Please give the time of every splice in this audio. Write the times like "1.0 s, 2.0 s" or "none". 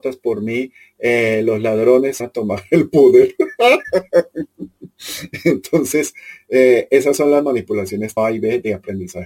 2.2 s, 8.2 s

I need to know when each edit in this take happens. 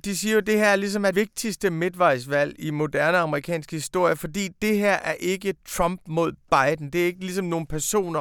1.1 s

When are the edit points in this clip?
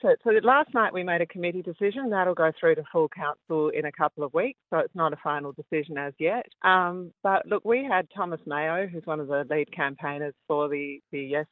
6.5 s

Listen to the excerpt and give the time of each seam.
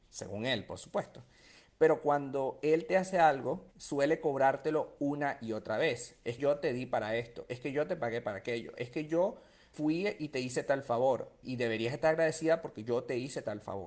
3.7 s, 6.4 s, 9.7 s, 11.4 s

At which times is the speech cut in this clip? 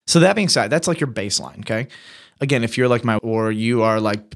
3.2 s

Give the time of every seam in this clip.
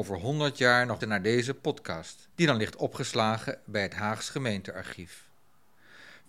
1.0 s, 2.3 s

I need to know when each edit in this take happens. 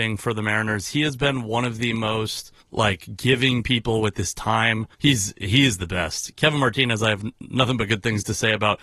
2.6 s, 4.9 s

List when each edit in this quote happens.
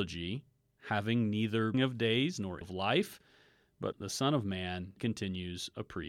1.7 s, 2.6 s, 3.9 s, 5.0 s

